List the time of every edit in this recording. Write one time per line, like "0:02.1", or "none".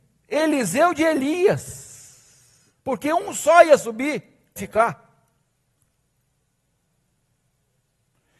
0:02.8
0:04.6